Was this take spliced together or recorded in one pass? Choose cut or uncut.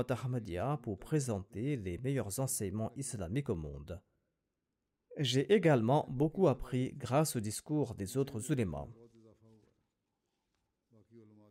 uncut